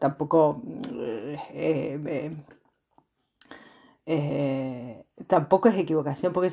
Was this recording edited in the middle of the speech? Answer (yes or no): no